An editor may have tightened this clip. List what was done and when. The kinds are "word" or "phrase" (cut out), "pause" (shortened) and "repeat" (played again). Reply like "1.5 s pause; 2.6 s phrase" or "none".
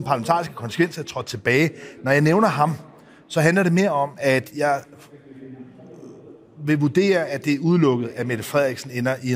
none

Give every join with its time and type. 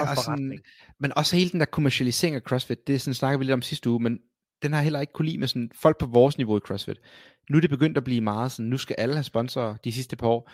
none

